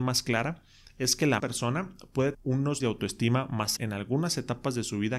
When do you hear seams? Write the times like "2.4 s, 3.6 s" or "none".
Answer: 1.4 s, 2.3 s, 2.8 s, 3.8 s